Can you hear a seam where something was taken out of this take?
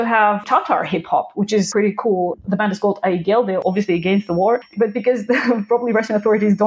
no; 0 cuts

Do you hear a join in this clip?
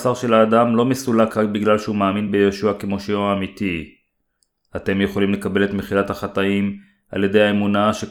no; 0 cuts

